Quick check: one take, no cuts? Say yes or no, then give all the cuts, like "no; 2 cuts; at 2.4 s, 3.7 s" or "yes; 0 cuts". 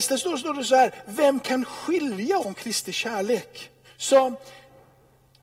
no; 2 cuts; at 2.4 s, 3.8 s